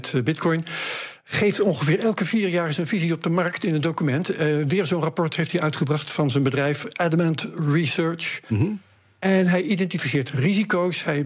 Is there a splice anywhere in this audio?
no; 0 cuts

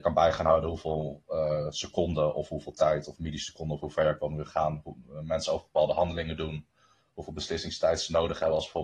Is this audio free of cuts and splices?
yes; 0 cuts

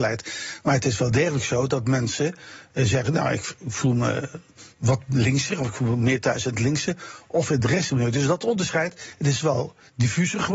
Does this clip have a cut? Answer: no; 0 cuts

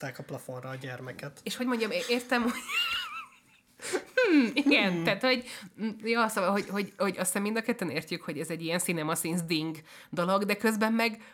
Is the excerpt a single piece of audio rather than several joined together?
yes; 0 cuts

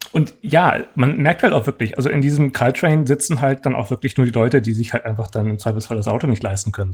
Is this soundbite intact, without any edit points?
yes; 0 cuts

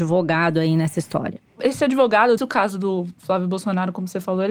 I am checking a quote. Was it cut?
yes; 1 cut; at 2.4 s

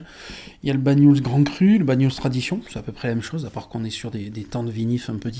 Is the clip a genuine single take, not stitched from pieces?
yes; 0 cuts

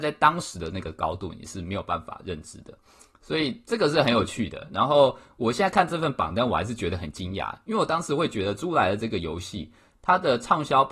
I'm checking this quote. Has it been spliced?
no; 0 cuts

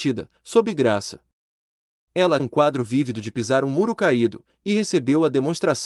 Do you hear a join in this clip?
yes; 1 cut; at 2.4 s

